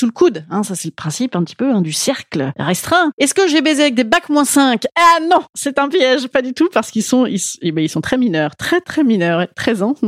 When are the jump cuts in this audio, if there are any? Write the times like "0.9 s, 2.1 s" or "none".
none